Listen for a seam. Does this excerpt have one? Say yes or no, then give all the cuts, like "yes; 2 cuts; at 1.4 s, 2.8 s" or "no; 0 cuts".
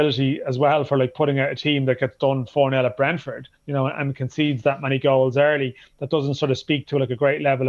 yes; 1 cut; at 3.5 s